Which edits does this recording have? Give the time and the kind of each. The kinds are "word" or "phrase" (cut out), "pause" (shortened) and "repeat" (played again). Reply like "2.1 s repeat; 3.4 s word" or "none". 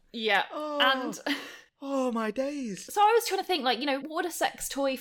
4.0 s word